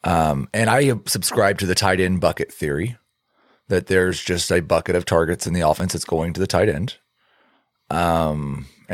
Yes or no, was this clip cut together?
no